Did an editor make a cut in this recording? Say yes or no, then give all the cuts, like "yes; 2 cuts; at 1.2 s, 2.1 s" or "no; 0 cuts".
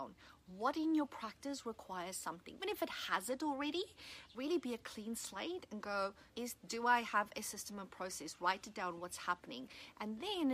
yes; 3 cuts; at 2.6 s, 4.3 s, 6.3 s